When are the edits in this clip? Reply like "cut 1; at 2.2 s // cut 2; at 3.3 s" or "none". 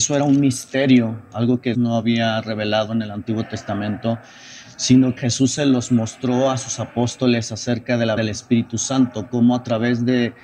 cut 1; at 1.7 s // cut 2; at 5.2 s // cut 3; at 8.2 s